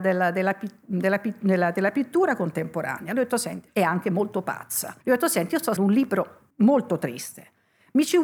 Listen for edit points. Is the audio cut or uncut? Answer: cut